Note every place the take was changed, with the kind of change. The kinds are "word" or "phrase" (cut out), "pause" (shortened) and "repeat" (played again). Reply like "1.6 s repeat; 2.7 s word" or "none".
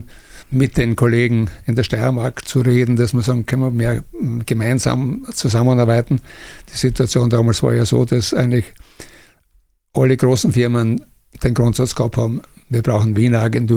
none

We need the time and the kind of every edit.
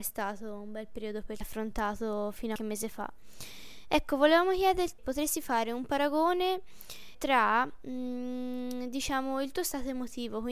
1.4 s phrase; 2.6 s phrase; 5.0 s word; 7.1 s word

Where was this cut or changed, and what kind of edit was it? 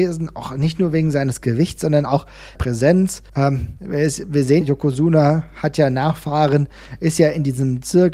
2.6 s phrase; 3.3 s pause; 4.6 s word

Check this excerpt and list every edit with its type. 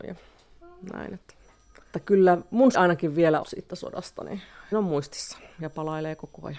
1.9 s word; 2.7 s word; 3.4 s phrase; 4.7 s word

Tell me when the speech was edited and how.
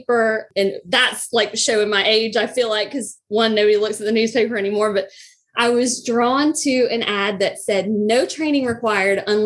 none

